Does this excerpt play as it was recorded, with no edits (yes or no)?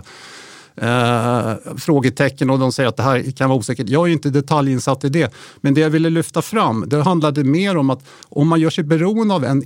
yes